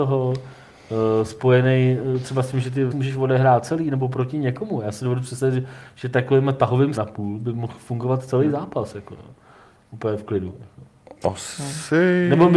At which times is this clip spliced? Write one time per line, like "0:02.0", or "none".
0:02.9
0:07.0